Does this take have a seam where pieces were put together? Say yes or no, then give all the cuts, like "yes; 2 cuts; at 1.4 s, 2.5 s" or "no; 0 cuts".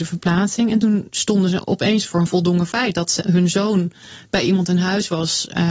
no; 0 cuts